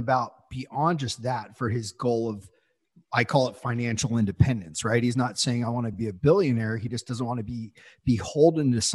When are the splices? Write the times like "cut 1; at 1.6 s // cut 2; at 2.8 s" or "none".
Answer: none

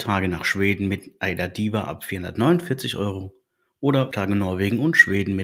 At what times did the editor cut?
cut 1; at 4.1 s

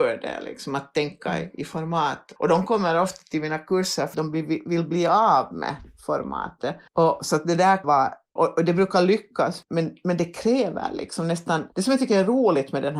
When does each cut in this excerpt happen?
cut 1; at 2.4 s // cut 2; at 4.1 s // cut 3; at 6.9 s // cut 4; at 7.8 s // cut 5; at 8.4 s // cut 6; at 9.6 s // cut 7; at 11.7 s

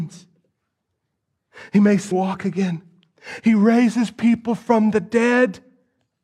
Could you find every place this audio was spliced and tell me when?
cut 1; at 2.1 s

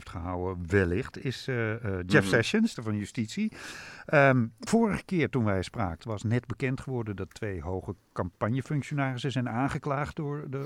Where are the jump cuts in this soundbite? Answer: cut 1; at 2.8 s // cut 2; at 4.7 s // cut 3; at 6.0 s

